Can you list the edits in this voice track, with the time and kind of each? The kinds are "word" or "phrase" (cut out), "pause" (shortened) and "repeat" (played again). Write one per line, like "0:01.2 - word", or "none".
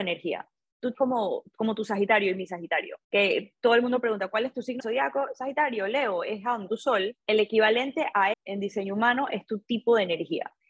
0:00.9 - phrase
0:03.0 - pause
0:04.8 - word
0:06.7 - word
0:07.2 - pause
0:08.3 - word